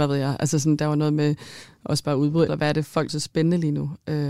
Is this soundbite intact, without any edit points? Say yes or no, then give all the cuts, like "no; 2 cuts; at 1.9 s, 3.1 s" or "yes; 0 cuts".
no; 2 cuts; at 2.5 s, 3.1 s